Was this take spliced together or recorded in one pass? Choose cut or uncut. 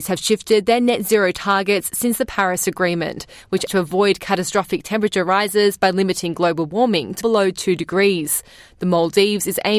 cut